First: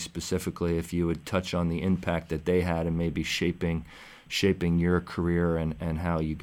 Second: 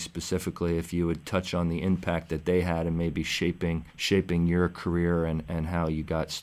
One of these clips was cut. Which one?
second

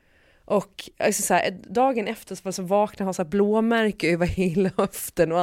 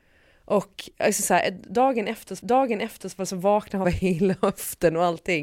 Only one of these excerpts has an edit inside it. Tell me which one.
second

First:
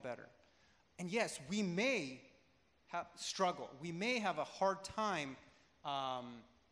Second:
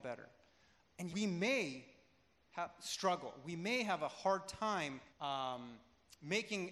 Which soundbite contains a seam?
second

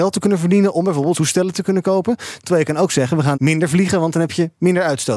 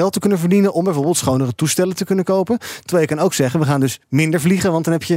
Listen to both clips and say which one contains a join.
first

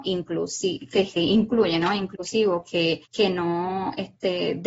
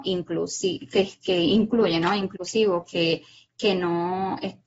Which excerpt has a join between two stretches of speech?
first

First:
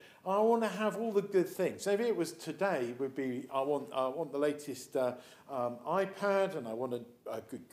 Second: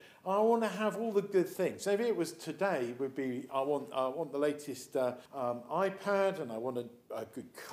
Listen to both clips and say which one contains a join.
second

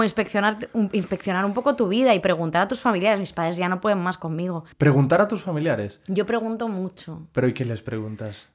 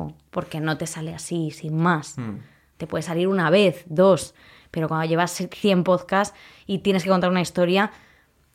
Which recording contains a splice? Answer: first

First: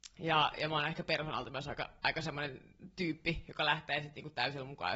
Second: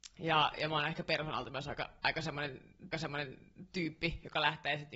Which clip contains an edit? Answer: second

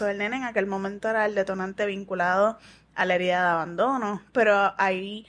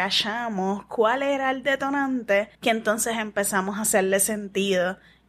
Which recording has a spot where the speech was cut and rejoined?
second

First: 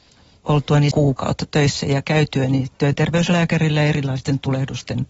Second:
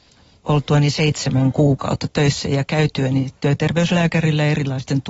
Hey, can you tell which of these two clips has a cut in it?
first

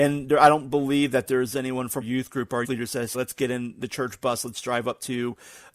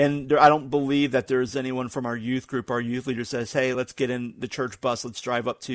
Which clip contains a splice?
first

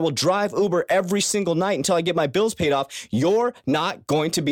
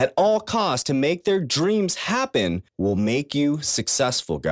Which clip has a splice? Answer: second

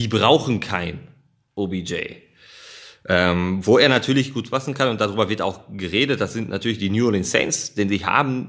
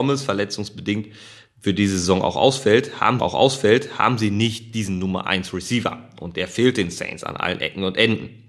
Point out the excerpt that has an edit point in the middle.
second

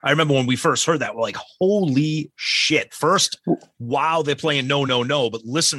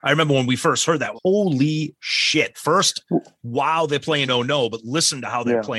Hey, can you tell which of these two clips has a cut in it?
second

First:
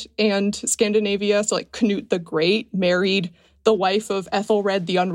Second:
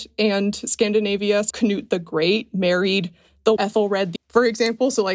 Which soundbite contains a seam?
second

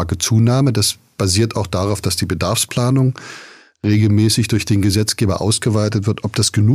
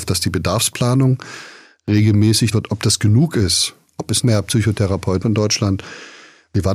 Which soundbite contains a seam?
second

